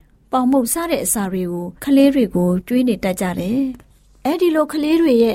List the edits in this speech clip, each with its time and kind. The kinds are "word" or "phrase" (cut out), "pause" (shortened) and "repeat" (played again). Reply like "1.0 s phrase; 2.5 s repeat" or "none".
1.8 s pause